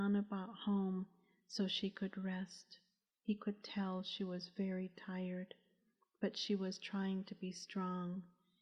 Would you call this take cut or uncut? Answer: uncut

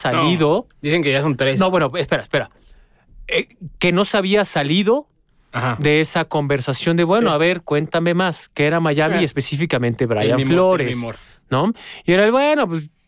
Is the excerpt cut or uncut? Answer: uncut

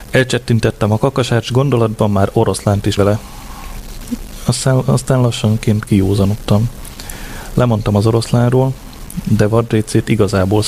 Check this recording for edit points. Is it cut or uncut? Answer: cut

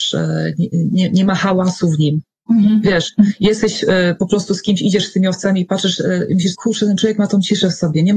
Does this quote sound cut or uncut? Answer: cut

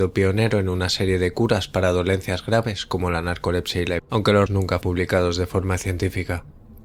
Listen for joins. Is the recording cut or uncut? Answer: cut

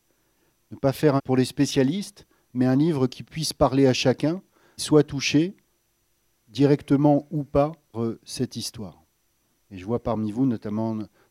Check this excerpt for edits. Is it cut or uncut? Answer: cut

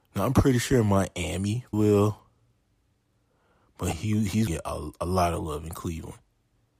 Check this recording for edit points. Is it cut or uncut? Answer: cut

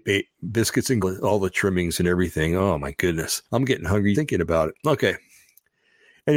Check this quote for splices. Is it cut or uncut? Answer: cut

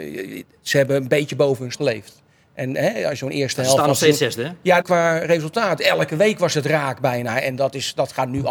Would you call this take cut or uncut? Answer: cut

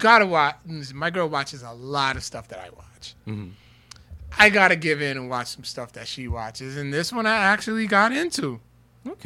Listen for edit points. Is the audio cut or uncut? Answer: cut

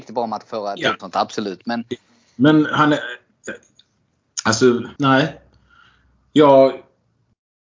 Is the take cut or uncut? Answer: cut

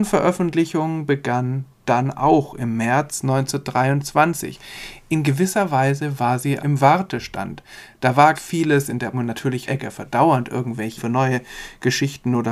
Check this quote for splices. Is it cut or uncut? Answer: cut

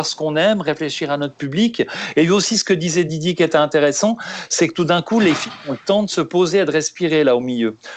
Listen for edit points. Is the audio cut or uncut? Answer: uncut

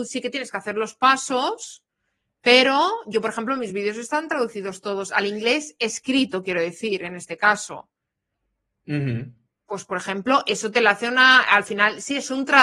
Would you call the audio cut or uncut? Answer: uncut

